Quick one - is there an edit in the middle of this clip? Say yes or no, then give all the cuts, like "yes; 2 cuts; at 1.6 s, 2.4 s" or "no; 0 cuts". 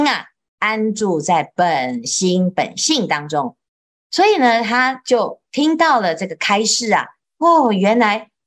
no; 0 cuts